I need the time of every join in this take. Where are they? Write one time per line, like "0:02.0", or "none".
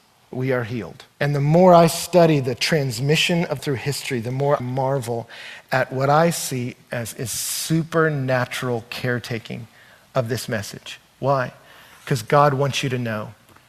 0:01.1
0:03.6
0:04.6